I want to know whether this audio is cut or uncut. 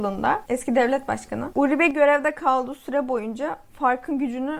uncut